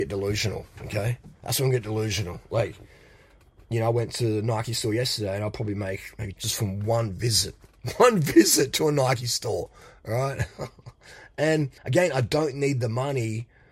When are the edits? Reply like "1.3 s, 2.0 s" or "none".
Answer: 6.3 s, 11.8 s